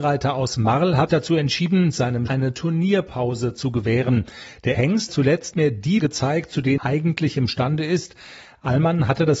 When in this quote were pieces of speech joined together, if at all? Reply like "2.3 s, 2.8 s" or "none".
1.1 s, 2.3 s, 4.7 s, 5.1 s, 5.5 s, 6.0 s, 6.8 s